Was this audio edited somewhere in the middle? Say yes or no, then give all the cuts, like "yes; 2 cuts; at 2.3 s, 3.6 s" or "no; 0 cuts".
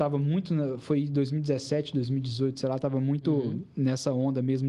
no; 0 cuts